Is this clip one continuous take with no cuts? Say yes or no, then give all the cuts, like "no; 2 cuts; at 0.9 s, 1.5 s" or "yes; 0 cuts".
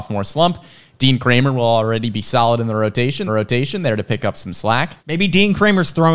no; 2 cuts; at 3.3 s, 5.0 s